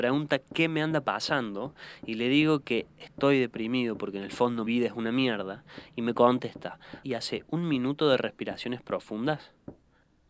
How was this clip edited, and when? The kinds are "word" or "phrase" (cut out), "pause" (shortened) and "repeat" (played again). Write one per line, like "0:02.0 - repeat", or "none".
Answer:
0:04.7 - word
0:07.0 - word